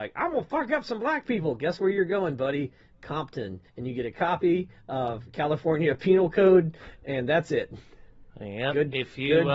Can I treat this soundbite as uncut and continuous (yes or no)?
no